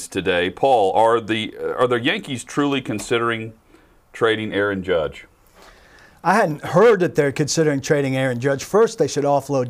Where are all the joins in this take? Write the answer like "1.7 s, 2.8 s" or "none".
none